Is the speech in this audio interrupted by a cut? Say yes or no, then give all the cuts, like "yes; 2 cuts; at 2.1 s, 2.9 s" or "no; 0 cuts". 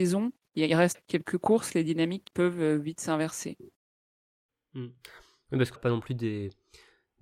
yes; 3 cuts; at 0.9 s, 2.3 s, 5.8 s